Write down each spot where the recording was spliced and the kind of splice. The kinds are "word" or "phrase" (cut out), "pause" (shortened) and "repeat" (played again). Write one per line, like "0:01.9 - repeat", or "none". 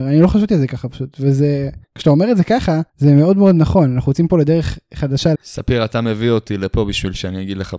0:01.8 - pause
0:02.9 - pause
0:05.3 - word